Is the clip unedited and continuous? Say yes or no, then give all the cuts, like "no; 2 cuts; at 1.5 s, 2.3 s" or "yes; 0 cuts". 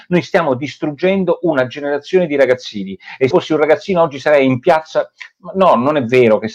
no; 1 cut; at 3.3 s